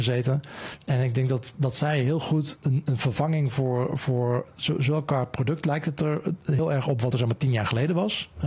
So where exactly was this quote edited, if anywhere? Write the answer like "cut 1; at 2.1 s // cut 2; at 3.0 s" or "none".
cut 1; at 7.1 s